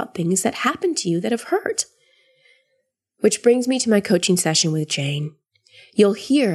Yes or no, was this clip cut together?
no